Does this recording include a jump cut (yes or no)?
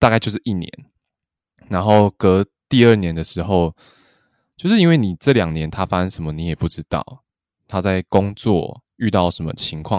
no